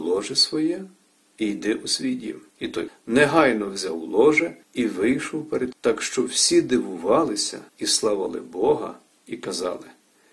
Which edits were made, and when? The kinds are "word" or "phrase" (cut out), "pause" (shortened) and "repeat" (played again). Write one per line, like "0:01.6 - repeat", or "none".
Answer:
0:02.5 - pause
0:02.9 - word
0:04.6 - pause
0:05.7 - word
0:07.7 - pause